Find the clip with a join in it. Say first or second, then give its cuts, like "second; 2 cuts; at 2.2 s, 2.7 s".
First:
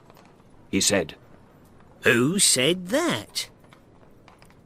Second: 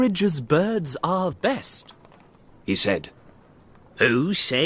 second; 1 cut; at 1.3 s